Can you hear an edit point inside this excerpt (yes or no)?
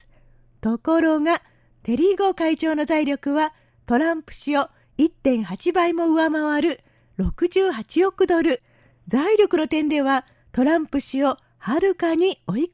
no